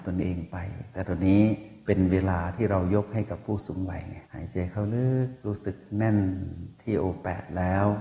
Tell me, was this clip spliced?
yes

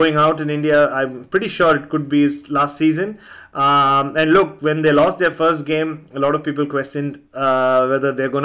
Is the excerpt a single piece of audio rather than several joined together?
yes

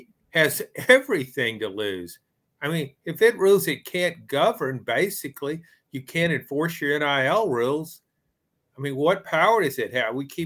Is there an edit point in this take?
no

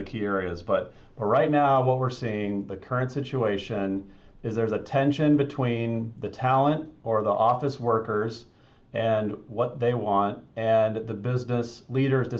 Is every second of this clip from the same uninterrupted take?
yes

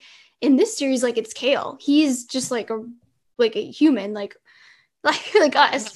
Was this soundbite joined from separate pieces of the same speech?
no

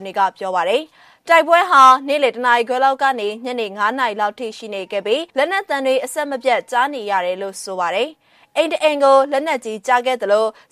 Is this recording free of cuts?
no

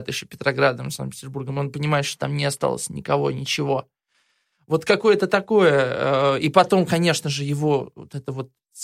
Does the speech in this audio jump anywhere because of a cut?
no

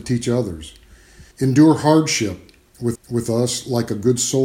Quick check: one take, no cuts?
no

